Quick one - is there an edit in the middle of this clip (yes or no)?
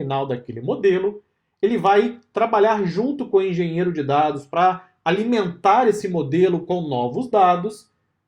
no